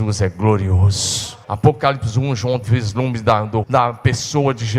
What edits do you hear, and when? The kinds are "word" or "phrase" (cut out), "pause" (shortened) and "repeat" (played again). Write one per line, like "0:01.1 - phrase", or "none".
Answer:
0:01.4 - pause
0:02.6 - phrase
0:03.6 - word